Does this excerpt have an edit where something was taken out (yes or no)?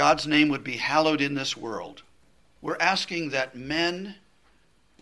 yes